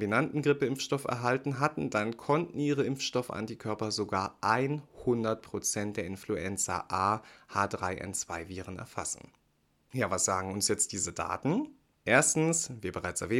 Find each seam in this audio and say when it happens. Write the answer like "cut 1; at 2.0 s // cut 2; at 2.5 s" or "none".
none